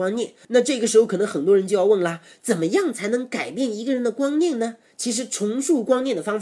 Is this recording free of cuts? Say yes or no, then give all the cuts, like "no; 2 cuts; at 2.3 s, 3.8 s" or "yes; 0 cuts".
yes; 0 cuts